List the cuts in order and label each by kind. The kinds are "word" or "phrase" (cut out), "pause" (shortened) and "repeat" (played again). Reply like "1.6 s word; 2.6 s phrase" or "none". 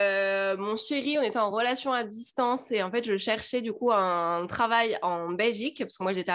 none